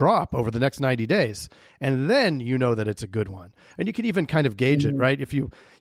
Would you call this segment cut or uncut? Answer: uncut